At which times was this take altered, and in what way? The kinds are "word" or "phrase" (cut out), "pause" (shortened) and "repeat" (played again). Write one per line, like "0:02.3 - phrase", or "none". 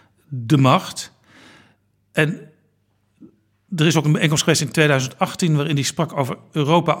none